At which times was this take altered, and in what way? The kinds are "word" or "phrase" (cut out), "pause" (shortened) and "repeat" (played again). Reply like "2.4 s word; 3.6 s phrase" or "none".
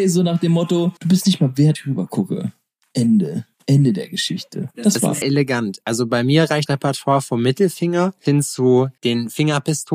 1.0 s pause; 1.7 s word; 3.5 s pause; 5.2 s word; 6.7 s word; 8.3 s word; 9.0 s word